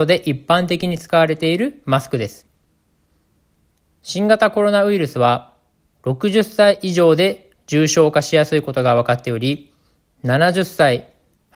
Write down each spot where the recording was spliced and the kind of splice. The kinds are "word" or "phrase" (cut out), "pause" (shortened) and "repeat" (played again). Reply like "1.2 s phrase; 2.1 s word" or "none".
none